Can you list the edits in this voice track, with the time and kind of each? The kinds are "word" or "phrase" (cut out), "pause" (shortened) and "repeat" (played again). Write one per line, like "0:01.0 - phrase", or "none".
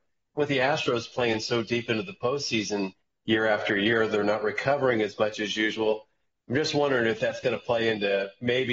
none